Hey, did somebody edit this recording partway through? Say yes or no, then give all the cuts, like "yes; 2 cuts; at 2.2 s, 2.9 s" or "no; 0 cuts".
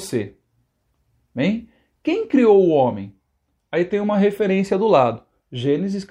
no; 0 cuts